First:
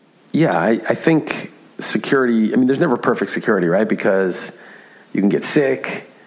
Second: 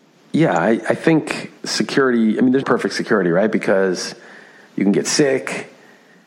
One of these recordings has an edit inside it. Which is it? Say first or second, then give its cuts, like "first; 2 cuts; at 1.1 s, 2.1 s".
second; 2 cuts; at 1.6 s, 2.6 s